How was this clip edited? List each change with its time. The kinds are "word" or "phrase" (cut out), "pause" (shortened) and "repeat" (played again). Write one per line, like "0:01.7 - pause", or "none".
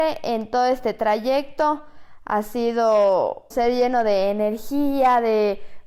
0:03.5 - word

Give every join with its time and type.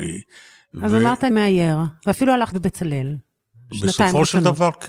0:01.3 - word
0:02.5 - word

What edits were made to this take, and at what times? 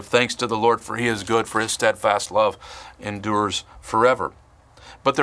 none

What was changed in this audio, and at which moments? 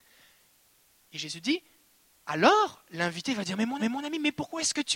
0:03.8 - repeat

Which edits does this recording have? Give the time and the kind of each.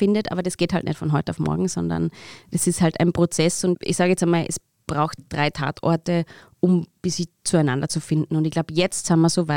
none

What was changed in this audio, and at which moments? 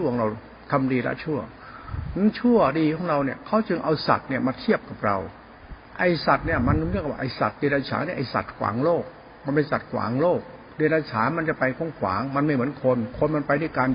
0:05.9 - pause

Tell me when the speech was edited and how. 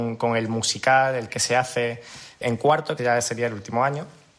0:01.3 - word
0:02.4 - word
0:03.0 - word

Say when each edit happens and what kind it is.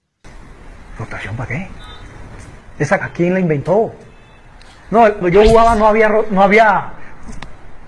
0:03.0 - word
0:05.2 - word

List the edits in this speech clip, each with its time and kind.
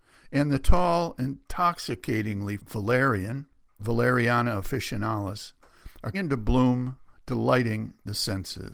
0:02.6 - word
0:03.8 - word
0:06.1 - word

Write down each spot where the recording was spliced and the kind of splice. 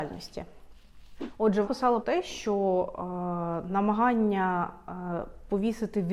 0:01.6 - word
0:02.0 - word

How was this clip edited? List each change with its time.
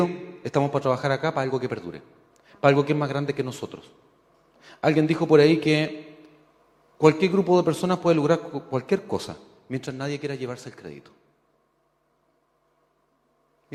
none

